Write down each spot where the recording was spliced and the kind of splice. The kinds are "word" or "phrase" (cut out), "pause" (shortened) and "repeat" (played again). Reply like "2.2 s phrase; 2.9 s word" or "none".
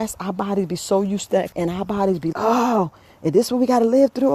1.5 s word; 2.3 s word